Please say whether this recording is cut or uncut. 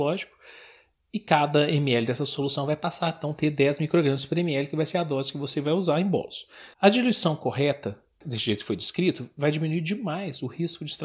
cut